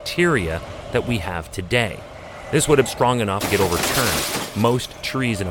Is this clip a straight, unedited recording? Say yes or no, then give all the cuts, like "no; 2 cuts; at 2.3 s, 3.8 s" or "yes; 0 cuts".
no; 2 cuts; at 2.9 s, 3.4 s